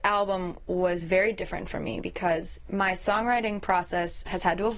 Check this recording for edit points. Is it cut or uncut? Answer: uncut